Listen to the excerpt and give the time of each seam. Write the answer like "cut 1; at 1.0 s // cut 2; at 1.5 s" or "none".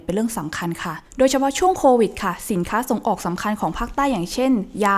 cut 1; at 1.1 s